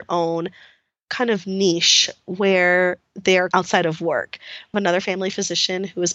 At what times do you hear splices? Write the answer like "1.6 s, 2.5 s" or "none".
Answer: 3.5 s, 4.7 s